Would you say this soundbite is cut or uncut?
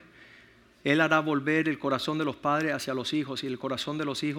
uncut